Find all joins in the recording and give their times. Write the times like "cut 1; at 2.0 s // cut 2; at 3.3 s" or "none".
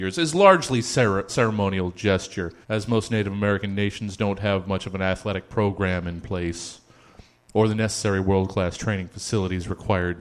cut 1; at 1.3 s // cut 2; at 2.6 s